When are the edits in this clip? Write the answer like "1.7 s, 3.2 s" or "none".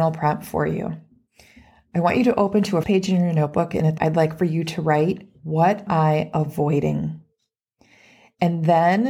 2.8 s, 4.0 s, 5.9 s